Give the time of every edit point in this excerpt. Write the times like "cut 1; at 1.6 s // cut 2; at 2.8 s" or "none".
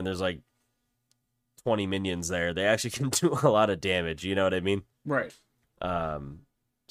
cut 1; at 4.9 s